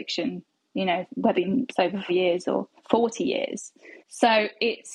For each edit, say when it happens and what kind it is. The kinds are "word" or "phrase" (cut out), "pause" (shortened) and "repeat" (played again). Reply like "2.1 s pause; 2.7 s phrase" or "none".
1.3 s word; 2.1 s phrase; 2.8 s pause; 4.0 s pause

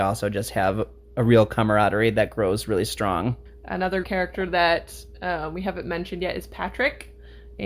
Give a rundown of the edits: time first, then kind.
4.0 s word

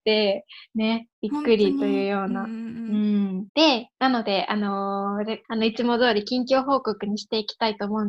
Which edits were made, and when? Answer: 1.1 s pause; 3.5 s pause; 5.4 s phrase

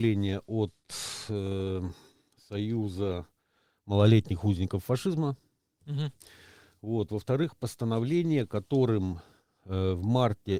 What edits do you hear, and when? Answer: none

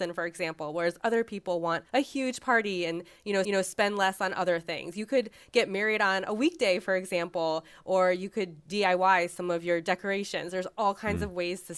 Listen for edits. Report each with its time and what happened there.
1.9 s pause; 3.4 s repeat

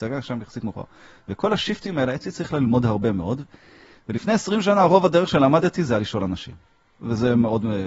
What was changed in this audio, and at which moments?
none

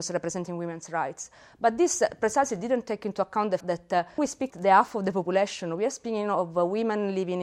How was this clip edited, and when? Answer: 3.6 s word; 4.2 s word; 4.5 s word

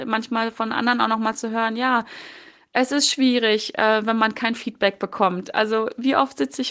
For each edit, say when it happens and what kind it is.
none

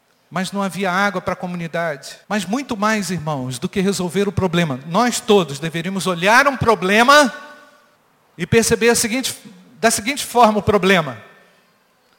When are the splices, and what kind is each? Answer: 2.2 s pause; 8.0 s pause

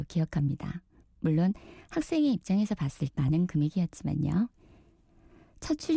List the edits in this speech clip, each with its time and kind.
1.0 s pause; 3.1 s word

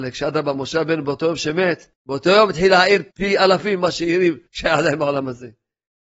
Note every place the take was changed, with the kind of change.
1.9 s pause; 3.1 s pause; 4.5 s pause

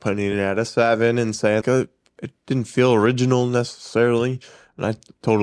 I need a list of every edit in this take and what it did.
1.6 s word

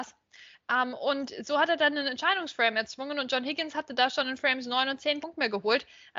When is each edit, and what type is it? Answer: 5.2 s word

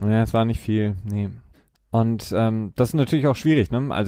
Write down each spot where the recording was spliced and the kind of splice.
1.5 s pause

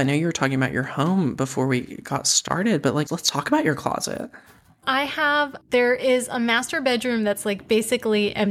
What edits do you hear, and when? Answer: 3.1 s word; 4.8 s word

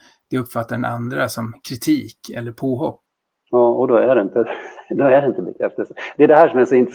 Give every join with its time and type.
none

